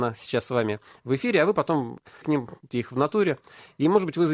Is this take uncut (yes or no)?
no